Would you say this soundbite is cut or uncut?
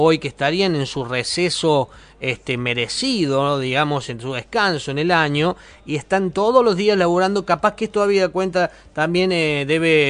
uncut